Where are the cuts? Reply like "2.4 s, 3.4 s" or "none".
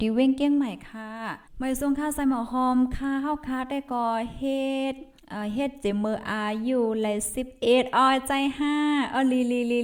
1.5 s, 5.2 s